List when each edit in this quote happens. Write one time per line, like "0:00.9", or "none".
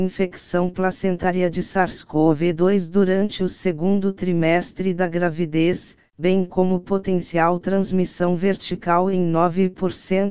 none